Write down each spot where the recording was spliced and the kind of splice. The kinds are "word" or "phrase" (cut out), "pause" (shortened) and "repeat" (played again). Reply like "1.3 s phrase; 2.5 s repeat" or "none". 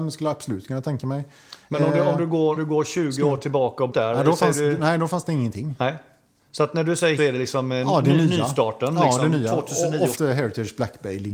2.6 s word; 3.9 s word; 7.2 s word; 10.1 s word